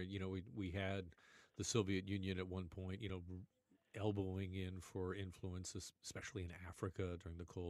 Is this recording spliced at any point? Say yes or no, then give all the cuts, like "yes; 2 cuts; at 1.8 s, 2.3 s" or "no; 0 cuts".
no; 0 cuts